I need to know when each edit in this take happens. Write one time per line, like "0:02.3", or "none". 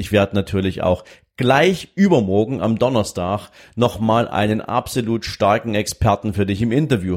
none